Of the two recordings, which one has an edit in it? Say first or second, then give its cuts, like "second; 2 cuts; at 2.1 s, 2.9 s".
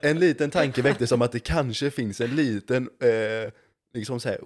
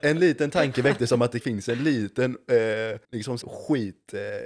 second; 3 cuts; at 1.4 s, 3.0 s, 3.4 s